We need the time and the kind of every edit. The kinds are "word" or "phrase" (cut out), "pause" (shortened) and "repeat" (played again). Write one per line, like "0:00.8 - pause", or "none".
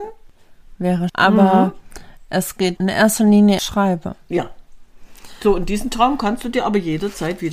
0:01.1 - word
0:02.8 - word
0:03.6 - phrase